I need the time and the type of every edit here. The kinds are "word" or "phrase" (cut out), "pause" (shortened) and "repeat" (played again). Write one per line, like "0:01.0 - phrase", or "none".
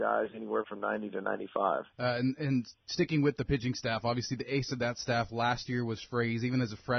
0:01.9 - pause